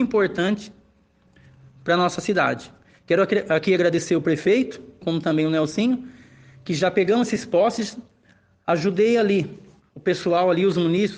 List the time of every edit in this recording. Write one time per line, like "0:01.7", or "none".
0:05.0